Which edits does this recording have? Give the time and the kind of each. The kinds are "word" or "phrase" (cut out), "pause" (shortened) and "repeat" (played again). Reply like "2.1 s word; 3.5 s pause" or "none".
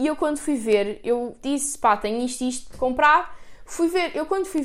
1.4 s word; 2.7 s word